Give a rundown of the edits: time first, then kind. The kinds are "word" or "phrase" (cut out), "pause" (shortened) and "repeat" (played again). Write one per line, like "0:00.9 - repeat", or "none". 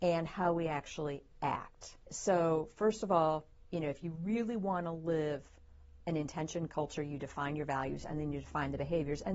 0:02.0 - pause